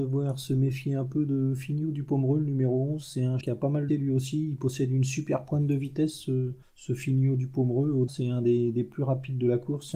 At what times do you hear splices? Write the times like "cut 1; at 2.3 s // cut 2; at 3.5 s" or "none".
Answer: cut 1; at 3.4 s // cut 2; at 3.9 s // cut 3; at 6.6 s // cut 4; at 8.1 s